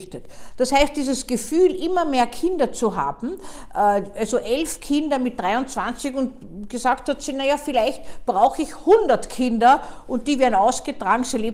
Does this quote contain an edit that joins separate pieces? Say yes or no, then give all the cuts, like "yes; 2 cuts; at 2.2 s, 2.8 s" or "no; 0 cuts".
no; 0 cuts